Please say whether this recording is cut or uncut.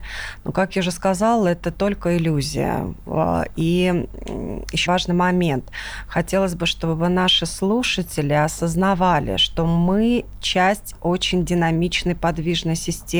cut